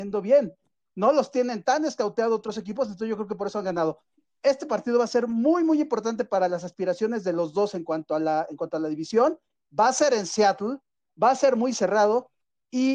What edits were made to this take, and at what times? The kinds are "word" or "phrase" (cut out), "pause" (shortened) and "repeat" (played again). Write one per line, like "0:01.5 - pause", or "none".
none